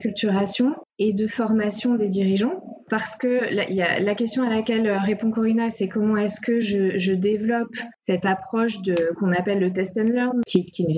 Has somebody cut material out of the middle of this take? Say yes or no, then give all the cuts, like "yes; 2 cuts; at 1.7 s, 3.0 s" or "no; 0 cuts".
no; 0 cuts